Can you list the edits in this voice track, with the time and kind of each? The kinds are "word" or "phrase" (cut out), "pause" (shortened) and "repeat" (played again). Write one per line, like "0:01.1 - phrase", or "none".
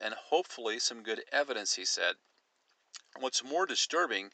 none

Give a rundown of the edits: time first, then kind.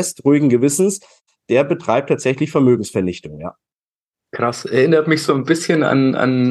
none

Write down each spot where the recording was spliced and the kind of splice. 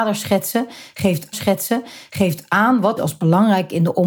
0:01.3 - repeat
0:03.0 - phrase

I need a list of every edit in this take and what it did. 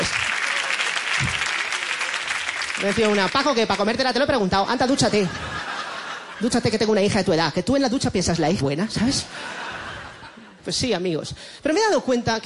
0:03.3 - word
0:08.6 - word

